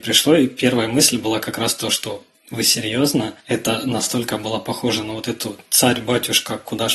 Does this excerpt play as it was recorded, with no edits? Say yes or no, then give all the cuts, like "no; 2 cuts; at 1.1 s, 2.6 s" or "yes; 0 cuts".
no; 1 cut; at 3.4 s